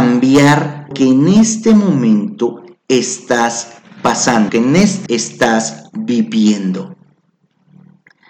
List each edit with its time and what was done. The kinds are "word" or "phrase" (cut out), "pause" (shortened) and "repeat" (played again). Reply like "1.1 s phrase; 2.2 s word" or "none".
0.9 s word; 4.5 s word; 5.1 s word